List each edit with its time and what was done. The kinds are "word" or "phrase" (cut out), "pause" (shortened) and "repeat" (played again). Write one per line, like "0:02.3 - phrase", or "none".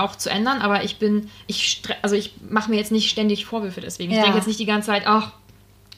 none